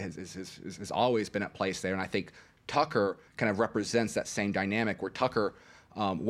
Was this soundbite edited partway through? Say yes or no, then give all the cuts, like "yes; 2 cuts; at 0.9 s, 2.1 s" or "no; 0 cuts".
yes; 1 cut; at 3.3 s